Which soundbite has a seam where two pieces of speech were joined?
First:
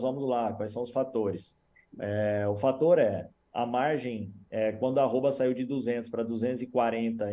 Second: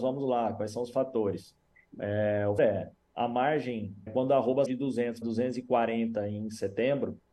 second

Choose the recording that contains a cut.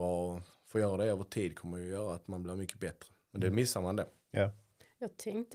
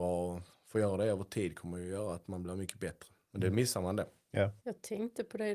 second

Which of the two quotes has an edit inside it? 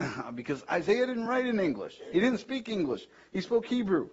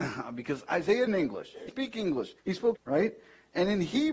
second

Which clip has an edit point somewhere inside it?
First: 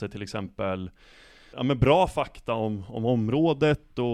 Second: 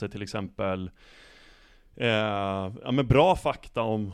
first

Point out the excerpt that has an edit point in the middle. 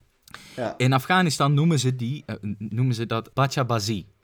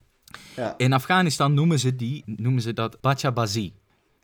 second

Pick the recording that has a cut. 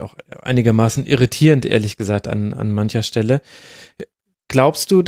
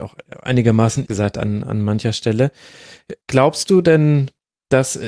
second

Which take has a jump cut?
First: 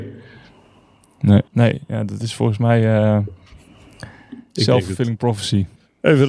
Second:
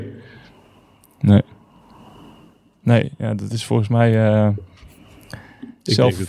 first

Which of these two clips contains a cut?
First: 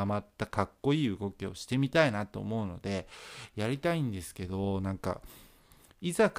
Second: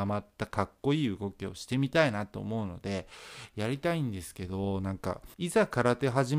second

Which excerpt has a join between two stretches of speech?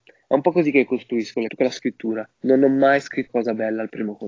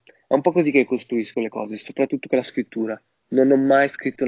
first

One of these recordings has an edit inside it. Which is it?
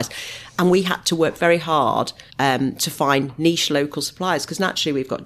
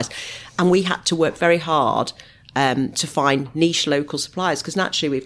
first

